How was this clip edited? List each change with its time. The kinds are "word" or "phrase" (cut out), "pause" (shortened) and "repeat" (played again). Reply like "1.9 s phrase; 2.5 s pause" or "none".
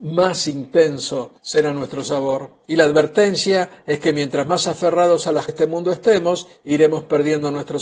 1.4 s pause; 2.6 s pause; 5.5 s phrase